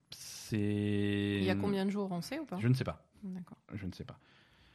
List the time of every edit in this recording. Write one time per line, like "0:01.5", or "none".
none